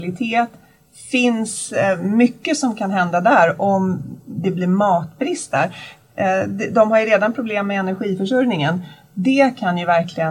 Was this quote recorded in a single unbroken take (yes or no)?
yes